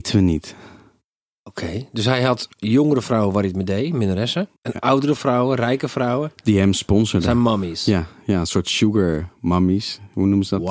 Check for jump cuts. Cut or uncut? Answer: cut